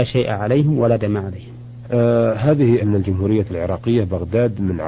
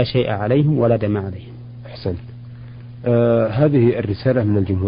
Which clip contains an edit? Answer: first; 2 cuts; at 1.8 s, 2.8 s

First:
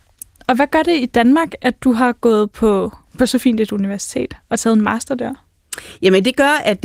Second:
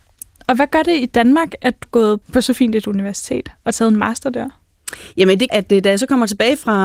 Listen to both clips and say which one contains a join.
second; 3 cuts; at 1.8 s, 2.2 s, 5.5 s

